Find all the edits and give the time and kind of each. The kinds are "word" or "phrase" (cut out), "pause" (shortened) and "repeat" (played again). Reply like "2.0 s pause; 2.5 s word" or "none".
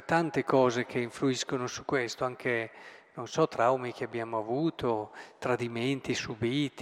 none